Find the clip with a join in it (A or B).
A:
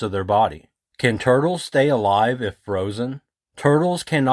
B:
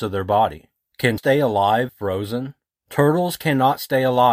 B